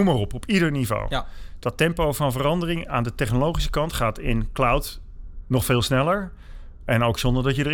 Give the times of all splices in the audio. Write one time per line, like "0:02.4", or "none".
0:05.4